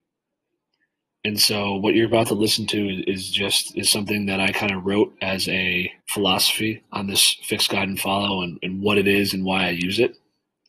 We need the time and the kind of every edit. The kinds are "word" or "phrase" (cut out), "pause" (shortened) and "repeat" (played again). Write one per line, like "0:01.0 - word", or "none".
0:06.0 - pause